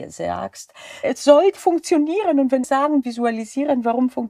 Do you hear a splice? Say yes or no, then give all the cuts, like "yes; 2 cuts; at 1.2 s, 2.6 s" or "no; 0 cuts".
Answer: yes; 4 cuts; at 1.0 s, 1.6 s, 2.6 s, 3.0 s